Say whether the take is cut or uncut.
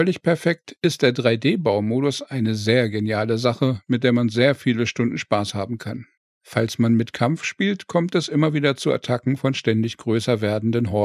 uncut